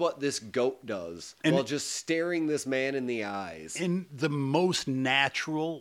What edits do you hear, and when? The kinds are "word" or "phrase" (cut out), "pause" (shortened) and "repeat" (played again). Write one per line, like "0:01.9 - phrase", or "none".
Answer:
0:01.4 - pause